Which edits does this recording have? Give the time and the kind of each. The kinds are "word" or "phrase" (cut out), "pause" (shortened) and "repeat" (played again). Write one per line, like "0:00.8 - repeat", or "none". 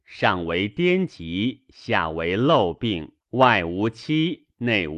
0:03.2 - pause